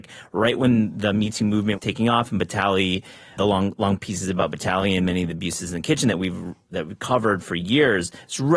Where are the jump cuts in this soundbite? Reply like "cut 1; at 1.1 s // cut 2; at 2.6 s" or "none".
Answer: cut 1; at 1.8 s // cut 2; at 3.4 s